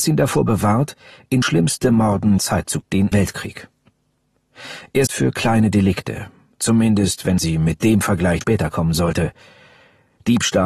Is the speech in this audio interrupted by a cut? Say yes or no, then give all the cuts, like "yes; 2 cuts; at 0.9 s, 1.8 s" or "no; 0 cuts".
yes; 7 cuts; at 1.4 s, 2.4 s, 2.8 s, 3.1 s, 5.1 s, 7.4 s, 8.4 s